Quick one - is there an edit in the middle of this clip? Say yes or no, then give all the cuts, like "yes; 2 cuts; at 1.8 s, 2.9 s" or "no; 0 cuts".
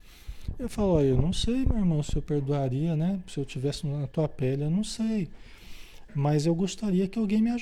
no; 0 cuts